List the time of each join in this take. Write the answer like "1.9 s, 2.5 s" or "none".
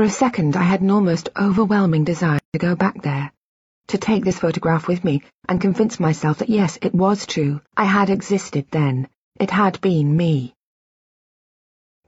2.4 s, 7.7 s